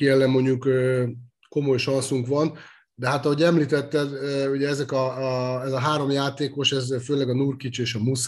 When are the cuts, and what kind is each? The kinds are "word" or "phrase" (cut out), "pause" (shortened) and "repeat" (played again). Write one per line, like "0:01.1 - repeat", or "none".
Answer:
none